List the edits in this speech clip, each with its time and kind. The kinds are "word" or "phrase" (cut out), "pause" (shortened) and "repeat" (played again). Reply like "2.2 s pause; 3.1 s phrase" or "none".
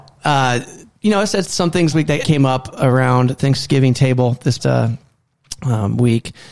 1.4 s word; 1.9 s word; 2.2 s word; 3.4 s word; 4.6 s word